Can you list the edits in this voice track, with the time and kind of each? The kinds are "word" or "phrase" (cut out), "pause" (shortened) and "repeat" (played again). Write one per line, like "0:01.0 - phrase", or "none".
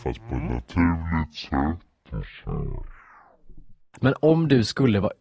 none